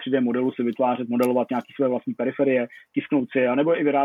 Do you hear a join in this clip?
no; 0 cuts

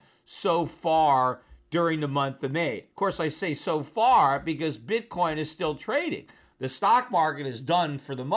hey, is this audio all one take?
yes; 0 cuts

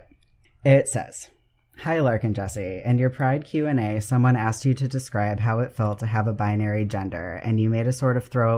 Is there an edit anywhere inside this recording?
no; 0 cuts

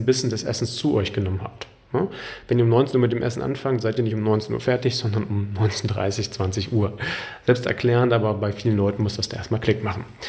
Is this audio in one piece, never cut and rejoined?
yes; 0 cuts

